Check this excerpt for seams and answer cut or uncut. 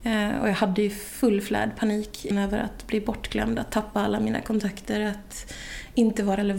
cut